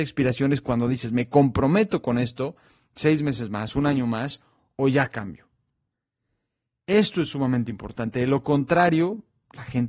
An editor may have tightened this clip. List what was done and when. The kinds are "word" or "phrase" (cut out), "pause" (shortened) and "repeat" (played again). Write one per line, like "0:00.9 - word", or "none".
none

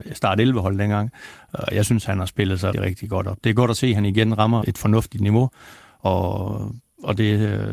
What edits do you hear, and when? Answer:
0:02.7 - word
0:04.6 - word

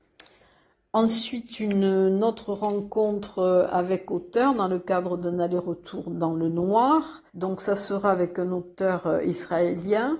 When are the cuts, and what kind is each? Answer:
0:07.3 - pause

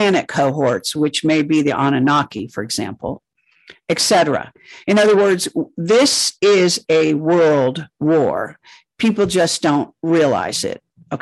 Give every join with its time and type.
none

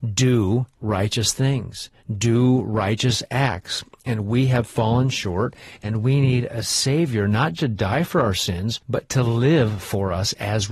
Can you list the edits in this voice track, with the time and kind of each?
0:07.6 - word
0:08.8 - pause

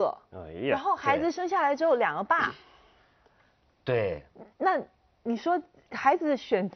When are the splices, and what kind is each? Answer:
none

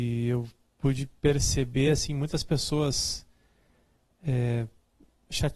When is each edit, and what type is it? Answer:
none

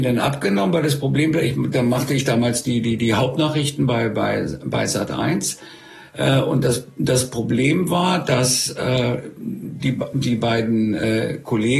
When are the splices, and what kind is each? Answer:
none

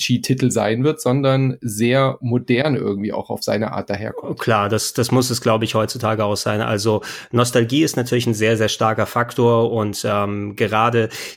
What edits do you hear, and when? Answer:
none

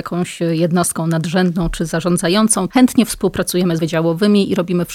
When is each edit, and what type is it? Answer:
0:02.7 - word
0:03.8 - phrase

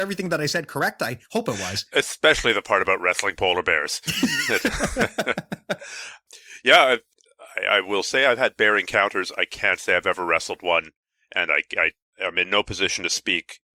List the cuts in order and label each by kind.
none

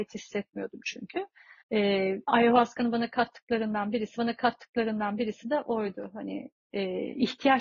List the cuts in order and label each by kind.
0:01.6 - pause
0:04.2 - repeat

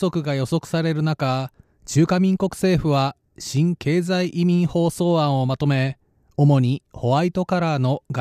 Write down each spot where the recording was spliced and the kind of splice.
none

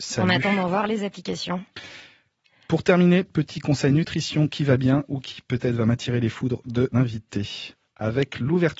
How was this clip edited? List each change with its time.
0:06.9 - word

